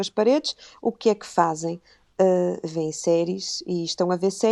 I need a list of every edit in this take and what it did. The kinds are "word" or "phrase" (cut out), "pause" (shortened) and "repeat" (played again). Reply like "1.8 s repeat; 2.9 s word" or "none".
none